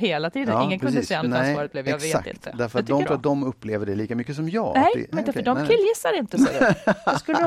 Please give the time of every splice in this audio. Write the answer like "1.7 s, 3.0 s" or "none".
1.2 s, 3.0 s, 5.1 s